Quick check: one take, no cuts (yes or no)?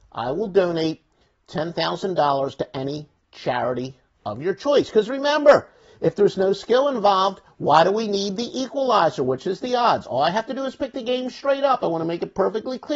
yes